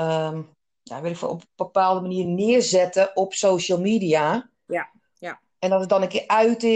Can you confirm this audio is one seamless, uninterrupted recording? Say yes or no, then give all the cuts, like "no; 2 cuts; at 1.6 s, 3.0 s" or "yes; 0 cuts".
yes; 0 cuts